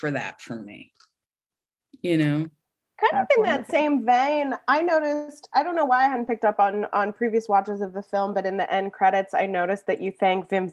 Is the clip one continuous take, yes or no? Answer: no